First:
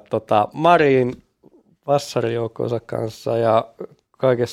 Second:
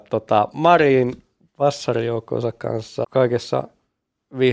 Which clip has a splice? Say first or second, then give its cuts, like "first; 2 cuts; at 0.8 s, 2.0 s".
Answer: second; 2 cuts; at 1.4 s, 3.0 s